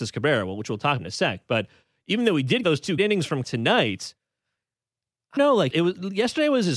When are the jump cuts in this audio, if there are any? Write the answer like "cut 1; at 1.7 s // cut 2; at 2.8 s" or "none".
cut 1; at 1.0 s // cut 2; at 2.6 s // cut 3; at 3.0 s // cut 4; at 3.4 s // cut 5; at 5.4 s // cut 6; at 5.7 s